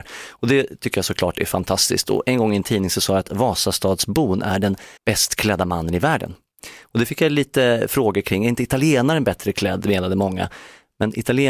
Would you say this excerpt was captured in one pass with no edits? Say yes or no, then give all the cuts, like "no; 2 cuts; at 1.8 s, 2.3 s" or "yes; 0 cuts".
no; 1 cut; at 5.0 s